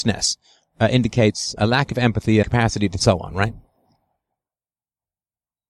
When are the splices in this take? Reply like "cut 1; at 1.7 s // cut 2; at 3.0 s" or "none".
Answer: cut 1; at 1.6 s // cut 2; at 2.4 s // cut 3; at 3.0 s